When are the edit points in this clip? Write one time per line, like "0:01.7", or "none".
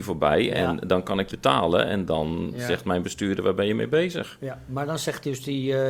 0:01.3